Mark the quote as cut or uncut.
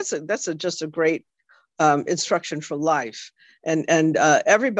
uncut